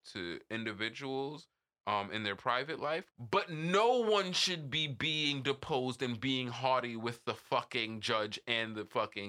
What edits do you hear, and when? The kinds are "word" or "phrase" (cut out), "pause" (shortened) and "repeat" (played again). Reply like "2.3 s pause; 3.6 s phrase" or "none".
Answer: 3.1 s pause